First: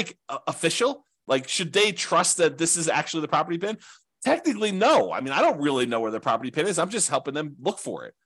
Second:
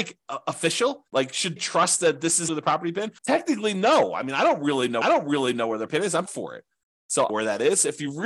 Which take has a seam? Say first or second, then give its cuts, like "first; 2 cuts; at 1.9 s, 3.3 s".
second; 8 cuts; at 1.1 s, 1.6 s, 2.5 s, 3.2 s, 5.0 s, 5.9 s, 6.3 s, 7.3 s